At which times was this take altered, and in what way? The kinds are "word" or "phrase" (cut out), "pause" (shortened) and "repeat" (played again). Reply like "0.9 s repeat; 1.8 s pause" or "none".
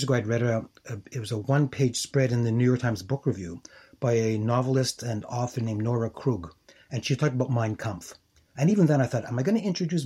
none